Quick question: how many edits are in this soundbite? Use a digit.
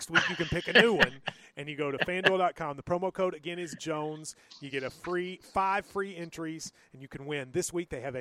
0